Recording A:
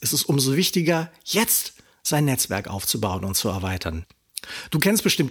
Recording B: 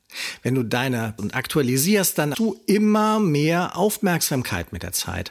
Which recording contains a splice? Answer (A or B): B